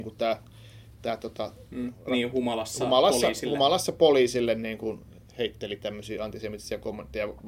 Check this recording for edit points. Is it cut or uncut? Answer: uncut